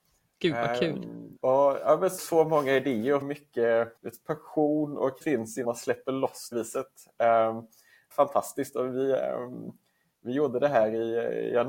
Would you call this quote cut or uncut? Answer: cut